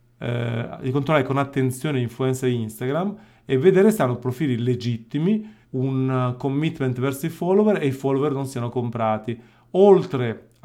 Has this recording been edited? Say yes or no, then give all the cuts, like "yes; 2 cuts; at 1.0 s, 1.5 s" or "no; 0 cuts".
yes; 1 cut; at 5.6 s